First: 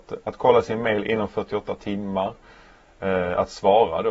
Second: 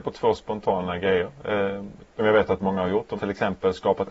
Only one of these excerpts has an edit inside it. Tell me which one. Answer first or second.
second